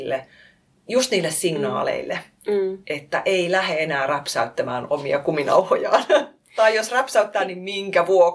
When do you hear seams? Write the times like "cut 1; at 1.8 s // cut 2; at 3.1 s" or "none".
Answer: cut 1; at 2.8 s

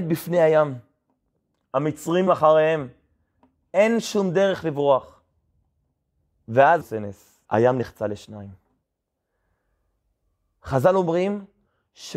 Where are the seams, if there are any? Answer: cut 1; at 2.3 s // cut 2; at 6.8 s // cut 3; at 7.4 s

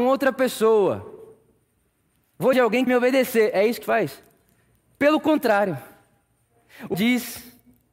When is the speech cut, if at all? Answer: cut 1; at 2.5 s // cut 2; at 2.9 s // cut 3; at 3.8 s // cut 4; at 6.9 s

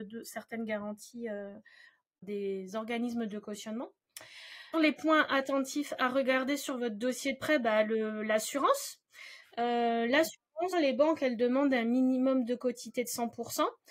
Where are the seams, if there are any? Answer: cut 1; at 2.2 s // cut 2; at 4.7 s // cut 3; at 10.7 s

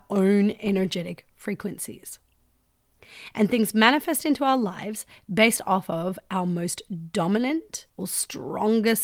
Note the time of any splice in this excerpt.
cut 1; at 7.9 s

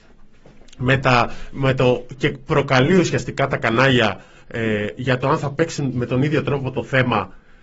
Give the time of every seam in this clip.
none

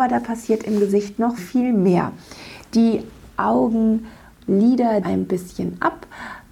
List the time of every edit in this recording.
cut 1; at 1.4 s // cut 2; at 5.0 s

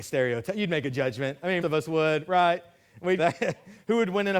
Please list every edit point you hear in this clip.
cut 1; at 1.6 s // cut 2; at 3.2 s

